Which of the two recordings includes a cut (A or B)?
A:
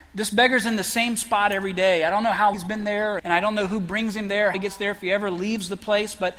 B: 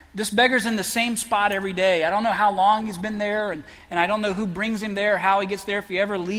A